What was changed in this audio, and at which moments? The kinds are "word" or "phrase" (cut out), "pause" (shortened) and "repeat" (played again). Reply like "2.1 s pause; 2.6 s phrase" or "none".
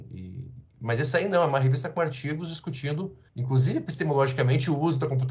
3.3 s pause